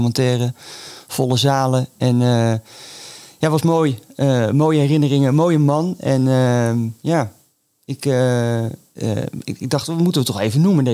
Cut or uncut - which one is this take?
uncut